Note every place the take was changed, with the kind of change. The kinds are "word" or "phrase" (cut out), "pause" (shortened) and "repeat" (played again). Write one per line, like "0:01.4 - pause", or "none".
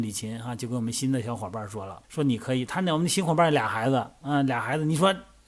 0:02.0 - pause

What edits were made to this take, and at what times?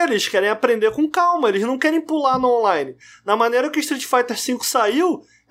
none

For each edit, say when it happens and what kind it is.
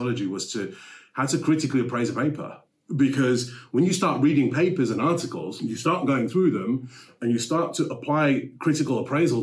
none

